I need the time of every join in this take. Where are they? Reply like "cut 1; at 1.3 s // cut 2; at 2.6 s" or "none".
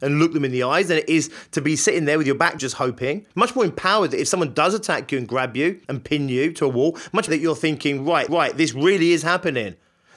cut 1; at 2.6 s // cut 2; at 3.3 s // cut 3; at 5.8 s // cut 4; at 7.3 s // cut 5; at 8.3 s